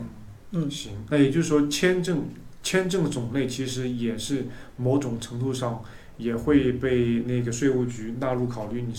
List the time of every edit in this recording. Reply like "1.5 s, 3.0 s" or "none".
1.1 s